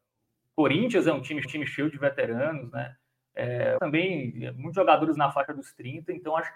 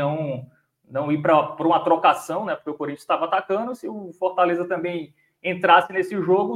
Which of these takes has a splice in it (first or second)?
first